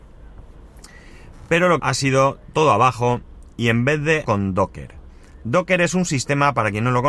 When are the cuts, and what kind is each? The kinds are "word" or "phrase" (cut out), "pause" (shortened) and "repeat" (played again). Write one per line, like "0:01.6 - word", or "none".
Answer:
0:01.8 - phrase
0:02.5 - word
0:03.5 - pause
0:04.2 - phrase